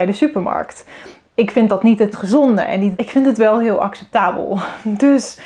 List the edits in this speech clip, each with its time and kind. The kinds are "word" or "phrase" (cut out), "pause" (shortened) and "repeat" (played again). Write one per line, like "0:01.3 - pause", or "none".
0:02.1 - word
0:02.9 - phrase